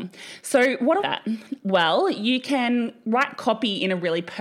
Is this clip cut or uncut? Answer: cut